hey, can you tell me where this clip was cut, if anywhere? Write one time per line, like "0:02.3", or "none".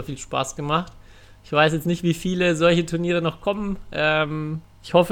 none